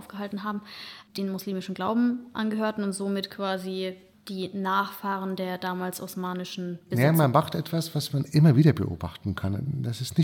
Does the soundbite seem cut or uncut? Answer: uncut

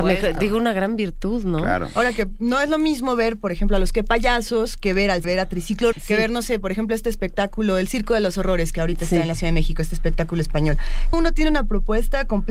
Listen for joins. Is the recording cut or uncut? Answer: cut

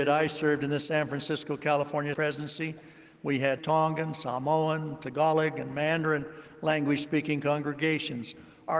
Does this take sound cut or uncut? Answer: cut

